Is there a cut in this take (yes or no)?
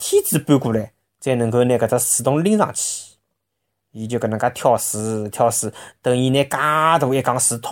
no